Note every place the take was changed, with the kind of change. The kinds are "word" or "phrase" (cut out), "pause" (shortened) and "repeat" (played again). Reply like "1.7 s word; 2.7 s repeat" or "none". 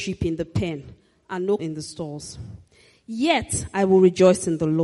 1.6 s word